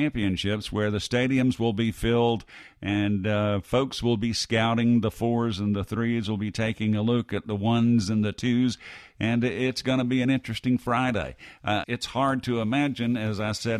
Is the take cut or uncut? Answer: cut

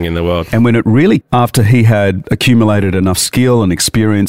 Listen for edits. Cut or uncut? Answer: cut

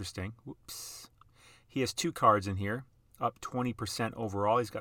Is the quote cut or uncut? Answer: uncut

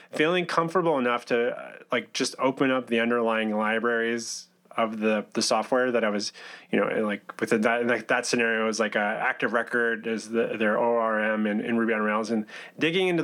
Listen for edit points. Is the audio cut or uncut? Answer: uncut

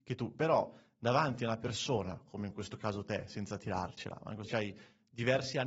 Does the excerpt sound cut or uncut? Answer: cut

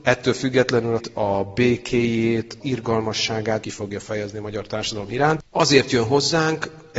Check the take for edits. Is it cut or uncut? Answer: cut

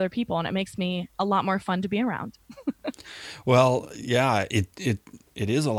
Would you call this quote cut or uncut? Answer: cut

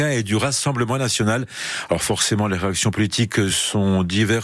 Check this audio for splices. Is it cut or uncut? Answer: uncut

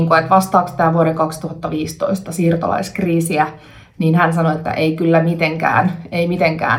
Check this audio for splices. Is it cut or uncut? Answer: uncut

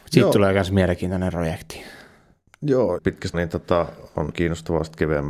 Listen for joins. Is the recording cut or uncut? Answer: cut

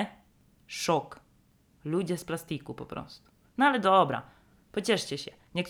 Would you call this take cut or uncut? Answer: uncut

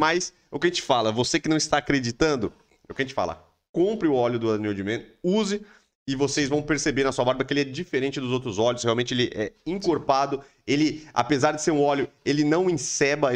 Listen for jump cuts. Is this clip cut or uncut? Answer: uncut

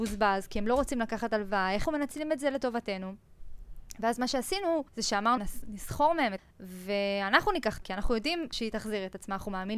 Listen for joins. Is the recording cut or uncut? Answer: cut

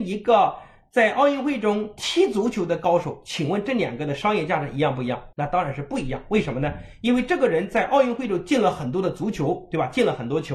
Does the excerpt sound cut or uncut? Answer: cut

